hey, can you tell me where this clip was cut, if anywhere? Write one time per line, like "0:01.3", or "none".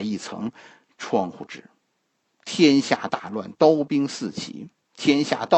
none